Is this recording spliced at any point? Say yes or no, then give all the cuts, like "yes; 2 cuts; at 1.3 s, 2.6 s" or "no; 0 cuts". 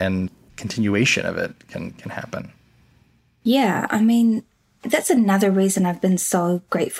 no; 0 cuts